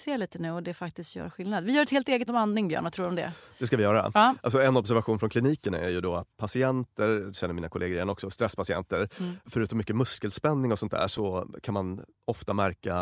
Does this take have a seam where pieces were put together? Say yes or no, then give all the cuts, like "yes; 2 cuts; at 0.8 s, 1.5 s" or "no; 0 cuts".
yes; 2 cuts; at 2.3 s, 6.3 s